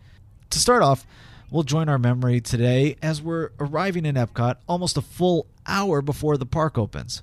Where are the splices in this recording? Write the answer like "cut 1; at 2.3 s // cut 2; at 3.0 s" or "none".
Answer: none